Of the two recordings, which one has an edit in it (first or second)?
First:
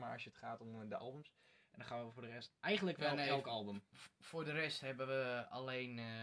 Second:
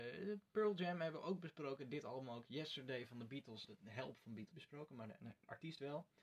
second